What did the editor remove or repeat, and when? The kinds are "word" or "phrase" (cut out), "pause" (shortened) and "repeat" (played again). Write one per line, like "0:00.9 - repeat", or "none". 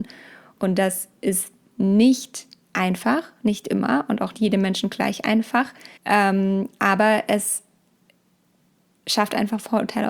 0:02.6 - pause
0:04.3 - phrase
0:06.0 - pause